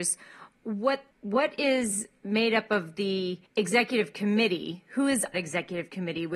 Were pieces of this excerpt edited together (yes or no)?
yes